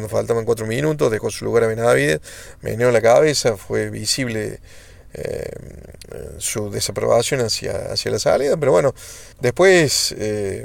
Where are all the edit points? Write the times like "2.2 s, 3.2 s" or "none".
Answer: 9.3 s